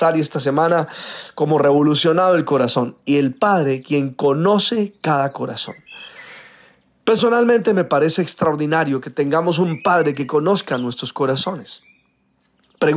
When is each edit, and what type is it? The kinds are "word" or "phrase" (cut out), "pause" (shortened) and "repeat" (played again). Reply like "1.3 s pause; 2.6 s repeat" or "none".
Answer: none